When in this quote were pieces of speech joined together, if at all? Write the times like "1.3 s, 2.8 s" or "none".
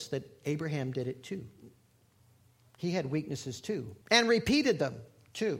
4.0 s